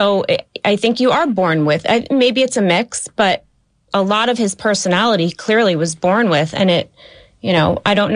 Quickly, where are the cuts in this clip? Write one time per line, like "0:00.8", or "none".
none

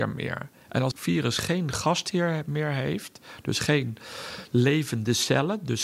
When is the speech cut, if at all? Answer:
0:00.9

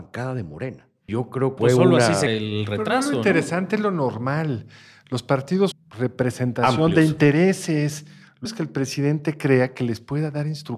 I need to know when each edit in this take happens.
0:01.1
0:01.6
0:02.3
0:05.7
0:08.5

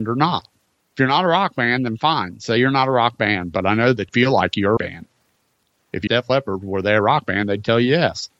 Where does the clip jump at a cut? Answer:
0:04.1
0:04.8
0:06.1

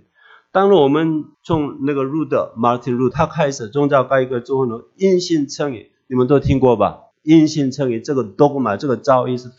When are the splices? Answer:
0:01.3
0:03.1
0:07.1

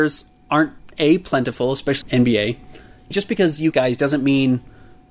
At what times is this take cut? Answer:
0:02.0
0:03.1
0:03.7

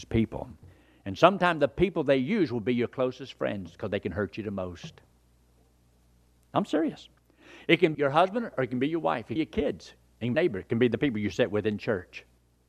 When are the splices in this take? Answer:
0:07.9
0:09.4
0:10.3

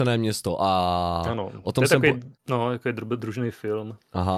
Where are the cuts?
0:02.4

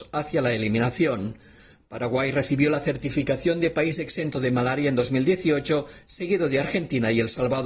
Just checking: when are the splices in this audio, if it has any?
none

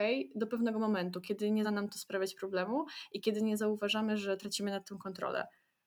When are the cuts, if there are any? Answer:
0:01.6

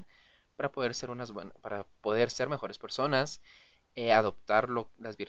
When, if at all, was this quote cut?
none

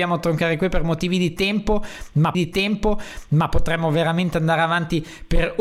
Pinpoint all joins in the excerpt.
0:02.3

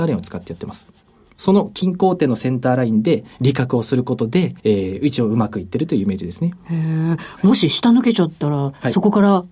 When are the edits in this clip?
0:03.3
0:04.6

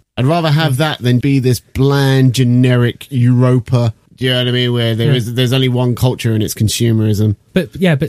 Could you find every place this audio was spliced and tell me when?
0:01.2

